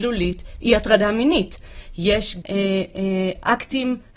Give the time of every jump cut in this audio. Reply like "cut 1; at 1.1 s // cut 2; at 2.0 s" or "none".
cut 1; at 2.4 s